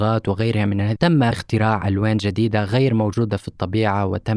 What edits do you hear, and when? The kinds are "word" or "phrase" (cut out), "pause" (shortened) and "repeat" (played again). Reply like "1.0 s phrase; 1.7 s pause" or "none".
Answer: 1.0 s word